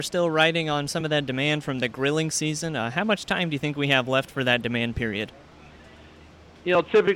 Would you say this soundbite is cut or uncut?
uncut